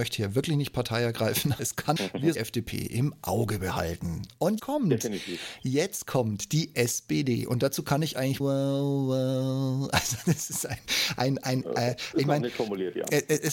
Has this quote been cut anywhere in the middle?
yes; 5 cuts; at 1.6 s, 2.0 s, 2.3 s, 4.6 s, 8.4 s

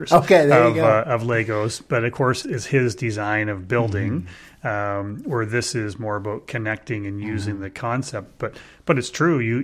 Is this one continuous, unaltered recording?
no; 1 cut; at 2.4 s

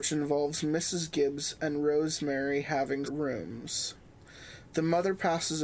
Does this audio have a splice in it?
yes; 1 cut; at 3.0 s

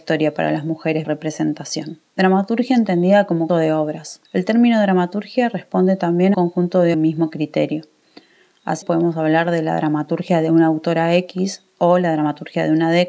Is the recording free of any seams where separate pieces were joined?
no; 7 cuts; at 1.0 s, 2.1 s, 3.5 s, 4.3 s, 6.3 s, 6.9 s, 8.8 s

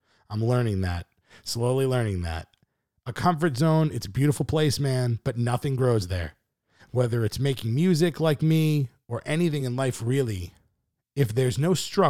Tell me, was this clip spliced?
no; 0 cuts

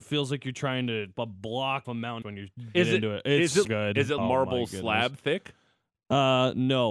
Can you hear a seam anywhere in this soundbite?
yes; 6 cuts; at 1.1 s, 1.8 s, 2.2 s, 2.7 s, 3.6 s, 4.2 s

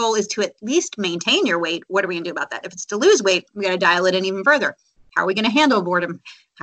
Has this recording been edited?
no; 0 cuts

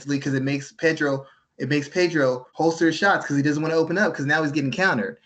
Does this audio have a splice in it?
yes; 1 cut; at 2.5 s

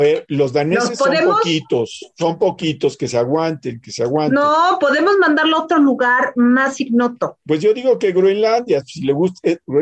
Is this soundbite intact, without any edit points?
yes; 0 cuts

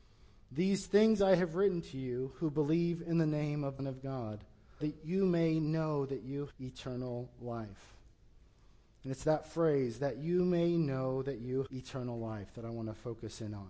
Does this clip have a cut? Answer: yes; 4 cuts; at 3.8 s, 4.8 s, 6.5 s, 11.7 s

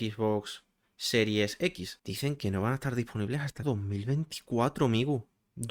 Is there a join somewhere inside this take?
yes; 1 cut; at 3.6 s

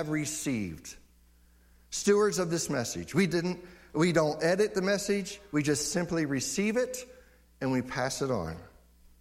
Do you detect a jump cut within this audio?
no; 0 cuts

